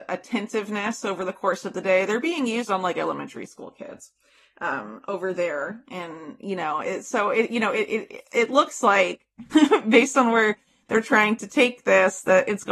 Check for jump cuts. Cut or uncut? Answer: uncut